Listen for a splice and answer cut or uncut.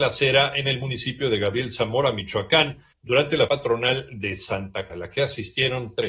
cut